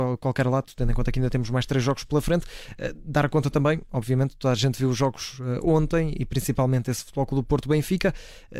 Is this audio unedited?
yes; 0 cuts

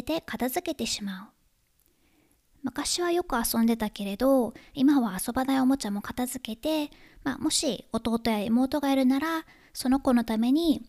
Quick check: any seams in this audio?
no; 0 cuts

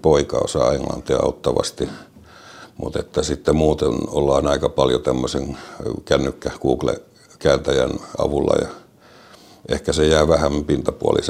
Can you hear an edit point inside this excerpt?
no; 0 cuts

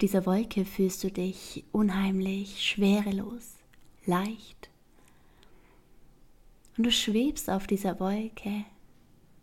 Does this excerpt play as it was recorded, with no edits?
yes; 0 cuts

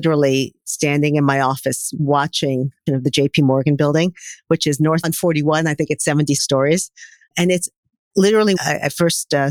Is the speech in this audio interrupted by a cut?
yes; 4 cuts; at 2.9 s, 5.0 s, 6.4 s, 8.6 s

